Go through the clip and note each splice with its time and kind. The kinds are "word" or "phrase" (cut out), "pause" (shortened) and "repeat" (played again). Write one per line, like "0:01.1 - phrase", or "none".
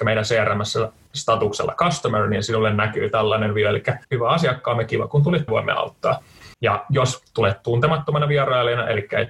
0:04.0 - pause
0:05.5 - phrase
0:06.5 - pause